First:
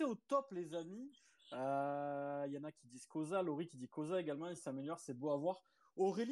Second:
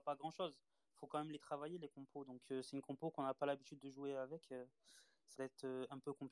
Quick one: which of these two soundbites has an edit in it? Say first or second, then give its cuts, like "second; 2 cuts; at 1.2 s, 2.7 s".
second; 1 cut; at 5.3 s